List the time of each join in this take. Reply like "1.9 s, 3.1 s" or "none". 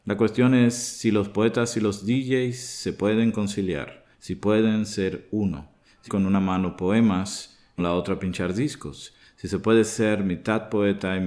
4.1 s, 6.1 s, 7.8 s